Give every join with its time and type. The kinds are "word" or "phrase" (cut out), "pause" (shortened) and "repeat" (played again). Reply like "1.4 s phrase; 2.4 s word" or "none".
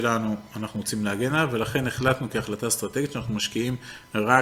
none